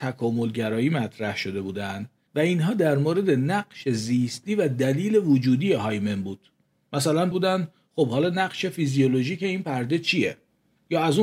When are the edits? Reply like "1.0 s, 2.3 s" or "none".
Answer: 2.3 s, 7.3 s